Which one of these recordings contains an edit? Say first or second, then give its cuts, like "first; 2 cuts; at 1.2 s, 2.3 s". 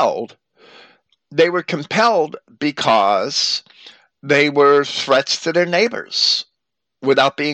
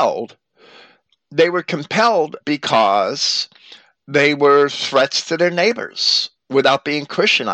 second; 2 cuts; at 2.4 s, 6.3 s